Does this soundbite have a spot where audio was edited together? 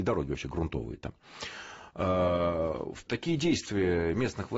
yes; 1 cut; at 3.1 s

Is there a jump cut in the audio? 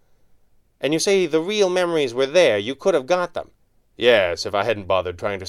yes; 1 cut; at 3.6 s

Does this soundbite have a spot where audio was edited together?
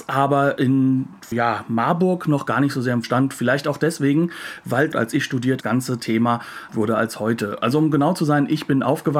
yes; 5 cuts; at 1.3 s, 3.0 s, 4.9 s, 5.6 s, 6.7 s

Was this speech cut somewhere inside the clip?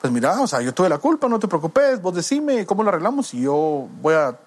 no; 0 cuts

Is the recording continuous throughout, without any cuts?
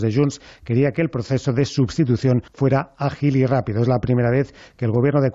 no; 1 cut; at 2.5 s

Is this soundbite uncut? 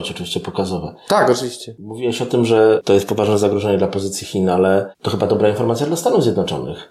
yes; 0 cuts

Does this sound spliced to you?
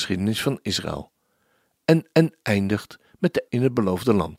yes; 2 cuts; at 2.1 s, 3.5 s

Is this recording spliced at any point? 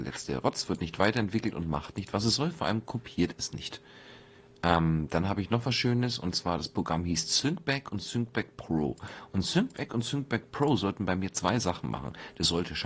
no; 0 cuts

